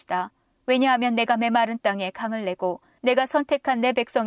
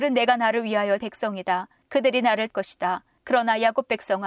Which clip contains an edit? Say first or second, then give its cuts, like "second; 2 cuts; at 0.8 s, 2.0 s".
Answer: second; 2 cuts; at 1.0 s, 2.5 s